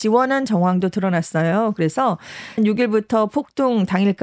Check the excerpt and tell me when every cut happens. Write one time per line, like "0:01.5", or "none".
0:02.6